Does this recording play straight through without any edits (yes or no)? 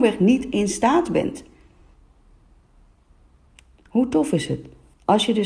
yes